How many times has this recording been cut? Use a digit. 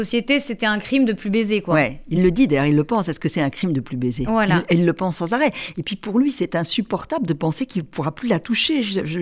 0